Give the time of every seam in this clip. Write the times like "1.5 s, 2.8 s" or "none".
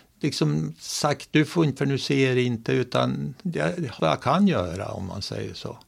1.8 s, 4.0 s